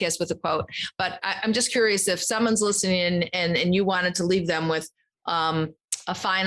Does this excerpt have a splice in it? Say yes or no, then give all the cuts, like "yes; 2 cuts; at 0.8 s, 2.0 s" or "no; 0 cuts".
no; 0 cuts